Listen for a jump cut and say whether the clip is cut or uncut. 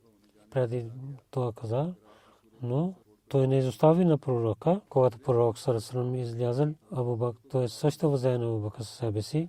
cut